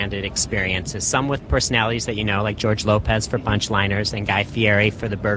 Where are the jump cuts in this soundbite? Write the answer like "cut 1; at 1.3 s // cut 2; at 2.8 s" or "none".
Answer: none